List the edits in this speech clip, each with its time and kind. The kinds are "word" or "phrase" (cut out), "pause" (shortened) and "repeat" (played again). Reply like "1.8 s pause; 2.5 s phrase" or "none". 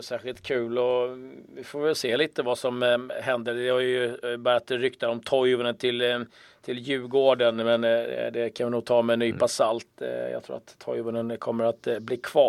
none